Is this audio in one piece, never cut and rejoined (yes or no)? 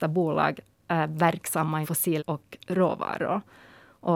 no